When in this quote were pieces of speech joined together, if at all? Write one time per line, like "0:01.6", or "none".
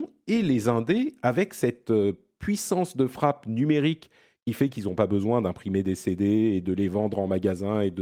none